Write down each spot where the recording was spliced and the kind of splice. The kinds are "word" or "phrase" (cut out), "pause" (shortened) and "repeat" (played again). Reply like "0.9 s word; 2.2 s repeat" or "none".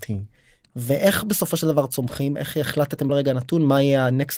3.1 s word